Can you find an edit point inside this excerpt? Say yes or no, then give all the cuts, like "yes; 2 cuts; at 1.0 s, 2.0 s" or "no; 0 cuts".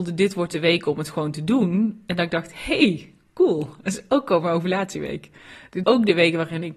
yes; 1 cut; at 5.8 s